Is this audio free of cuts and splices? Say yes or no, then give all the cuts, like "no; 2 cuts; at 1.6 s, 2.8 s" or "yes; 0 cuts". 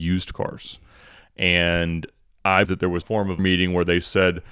no; 3 cuts; at 2.6 s, 3.0 s, 3.4 s